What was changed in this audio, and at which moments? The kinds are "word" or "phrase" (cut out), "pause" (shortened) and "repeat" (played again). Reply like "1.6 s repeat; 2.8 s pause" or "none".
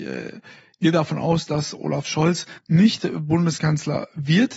2.6 s pause